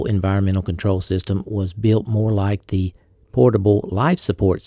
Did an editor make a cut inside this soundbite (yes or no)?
no